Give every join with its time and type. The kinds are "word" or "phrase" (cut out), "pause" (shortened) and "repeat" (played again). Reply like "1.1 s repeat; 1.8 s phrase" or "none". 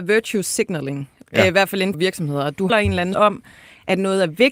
1.9 s word; 2.7 s word; 3.1 s word